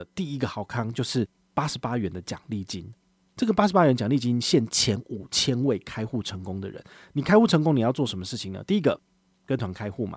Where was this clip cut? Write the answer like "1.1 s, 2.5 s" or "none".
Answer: none